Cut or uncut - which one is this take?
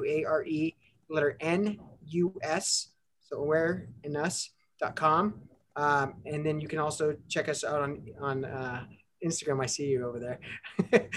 uncut